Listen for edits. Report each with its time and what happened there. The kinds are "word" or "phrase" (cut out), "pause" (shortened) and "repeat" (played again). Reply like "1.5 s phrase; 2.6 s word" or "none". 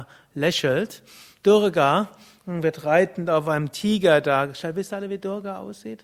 none